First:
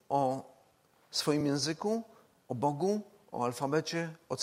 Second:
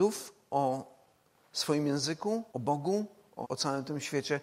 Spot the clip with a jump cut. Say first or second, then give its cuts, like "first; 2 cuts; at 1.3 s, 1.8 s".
second; 2 cuts; at 2.5 s, 3.4 s